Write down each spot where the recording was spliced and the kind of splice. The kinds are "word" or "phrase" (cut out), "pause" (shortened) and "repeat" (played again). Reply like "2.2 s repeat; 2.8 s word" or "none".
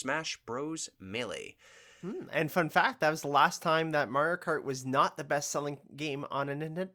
none

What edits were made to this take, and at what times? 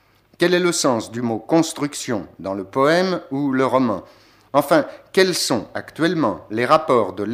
none

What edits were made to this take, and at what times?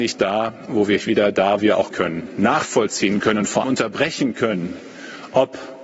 1.0 s phrase; 1.6 s word; 1.9 s word; 3.6 s word

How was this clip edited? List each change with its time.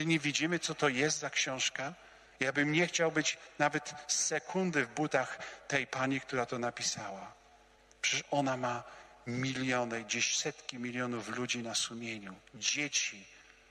none

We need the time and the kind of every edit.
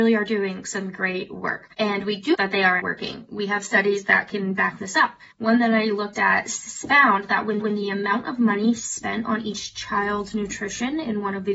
1.7 s pause; 2.3 s word; 2.8 s word; 5.3 s pause; 7.6 s repeat

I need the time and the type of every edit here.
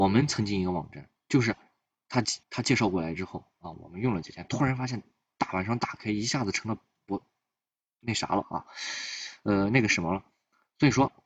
2.4 s pause

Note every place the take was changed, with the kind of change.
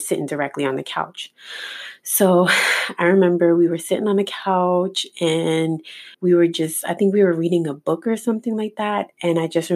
6.1 s pause

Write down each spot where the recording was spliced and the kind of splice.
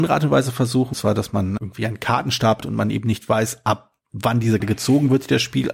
0.9 s word; 1.6 s word; 2.6 s word; 4.0 s pause; 4.6 s word

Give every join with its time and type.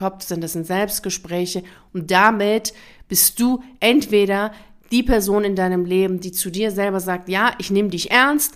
none

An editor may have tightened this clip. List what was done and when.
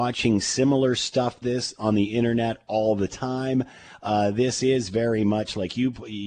1.4 s word

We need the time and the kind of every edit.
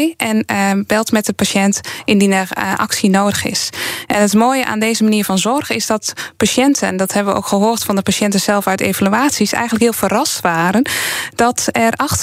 none

